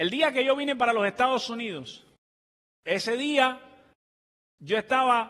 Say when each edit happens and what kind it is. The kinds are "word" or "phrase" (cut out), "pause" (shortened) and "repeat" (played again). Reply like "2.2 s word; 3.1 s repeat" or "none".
none

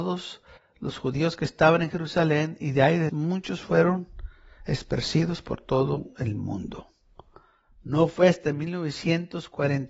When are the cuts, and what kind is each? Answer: 3.1 s word

